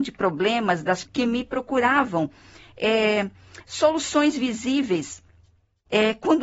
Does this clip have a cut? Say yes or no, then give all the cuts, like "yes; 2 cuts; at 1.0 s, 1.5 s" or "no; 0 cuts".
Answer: yes; 2 cuts; at 1.1 s, 3.6 s